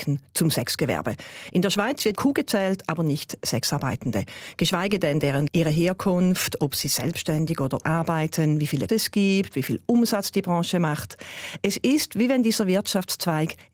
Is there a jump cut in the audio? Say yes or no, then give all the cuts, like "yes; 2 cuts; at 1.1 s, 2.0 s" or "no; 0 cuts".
yes; 4 cuts; at 2.1 s, 5.5 s, 7.8 s, 8.9 s